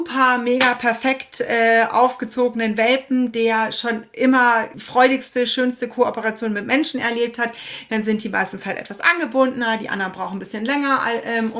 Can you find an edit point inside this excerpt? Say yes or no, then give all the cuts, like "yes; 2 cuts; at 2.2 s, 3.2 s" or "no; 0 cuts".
no; 0 cuts